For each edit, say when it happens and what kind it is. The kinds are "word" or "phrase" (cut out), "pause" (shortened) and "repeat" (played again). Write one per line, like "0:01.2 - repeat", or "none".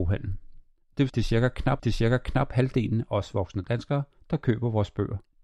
0:01.1 - word
0:01.8 - repeat